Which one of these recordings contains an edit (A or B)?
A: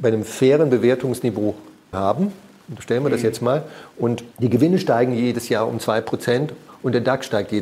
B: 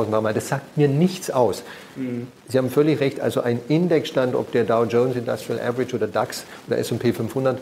A